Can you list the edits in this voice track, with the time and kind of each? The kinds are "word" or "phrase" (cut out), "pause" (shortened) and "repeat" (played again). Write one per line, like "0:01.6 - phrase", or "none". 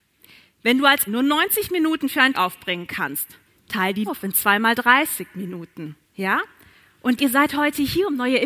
0:01.1 - phrase
0:02.3 - word
0:03.5 - pause
0:04.1 - word
0:06.0 - pause
0:07.2 - word